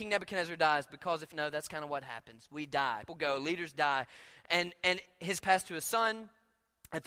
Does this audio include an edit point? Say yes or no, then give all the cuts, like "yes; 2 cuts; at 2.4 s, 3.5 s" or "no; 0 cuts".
yes; 3 cuts; at 1.3 s, 3.1 s, 5.4 s